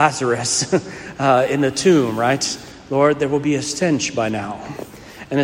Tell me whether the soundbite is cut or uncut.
uncut